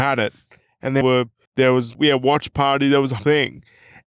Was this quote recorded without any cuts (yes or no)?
no